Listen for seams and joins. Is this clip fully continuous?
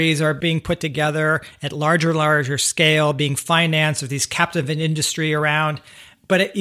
yes; 0 cuts

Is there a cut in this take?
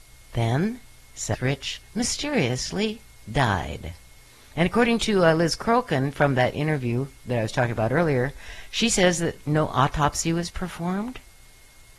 no; 0 cuts

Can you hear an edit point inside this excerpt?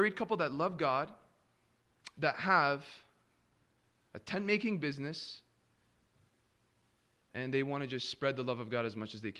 no; 0 cuts

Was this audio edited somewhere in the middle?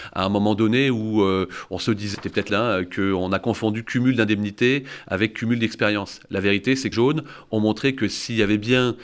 yes; 3 cuts; at 2.1 s, 2.5 s, 6.9 s

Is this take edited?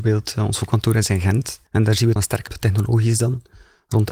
yes; 3 cuts; at 1.7 s, 2.2 s, 2.5 s

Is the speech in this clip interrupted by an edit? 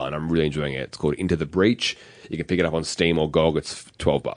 no; 0 cuts

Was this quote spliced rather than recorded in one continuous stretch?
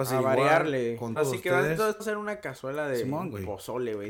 yes; 2 cuts; at 1.2 s, 2.0 s

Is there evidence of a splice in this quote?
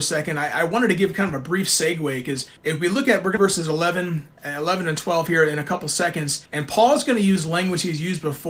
yes; 3 cuts; at 2.6 s, 3.4 s, 6.5 s

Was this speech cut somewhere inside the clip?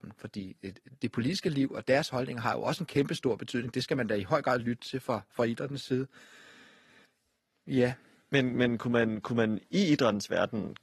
no; 0 cuts

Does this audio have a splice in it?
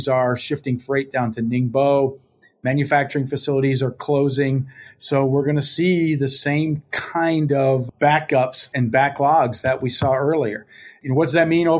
no; 0 cuts

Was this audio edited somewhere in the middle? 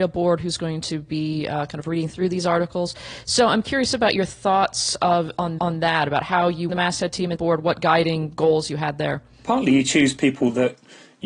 yes; 4 cuts; at 5.6 s, 6.7 s, 7.4 s, 9.3 s

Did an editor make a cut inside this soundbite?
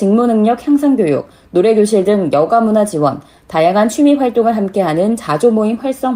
no; 0 cuts

